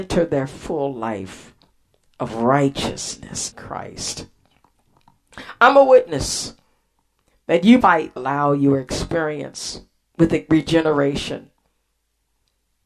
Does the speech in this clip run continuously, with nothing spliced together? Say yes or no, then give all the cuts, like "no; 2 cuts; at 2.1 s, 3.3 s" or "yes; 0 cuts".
no; 3 cuts; at 3.5 s, 7.8 s, 8.2 s